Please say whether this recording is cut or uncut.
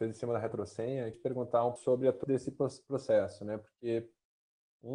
cut